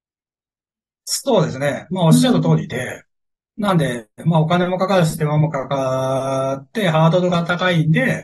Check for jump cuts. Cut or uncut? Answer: uncut